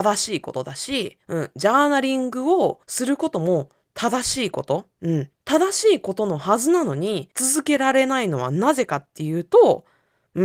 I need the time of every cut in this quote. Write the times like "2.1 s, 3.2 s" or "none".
1.2 s, 2.8 s, 4.9 s, 5.3 s, 7.3 s